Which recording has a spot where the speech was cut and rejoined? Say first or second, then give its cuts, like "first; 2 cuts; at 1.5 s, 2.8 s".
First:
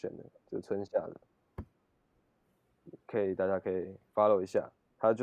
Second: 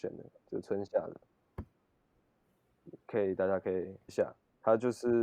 second; 1 cut; at 4.1 s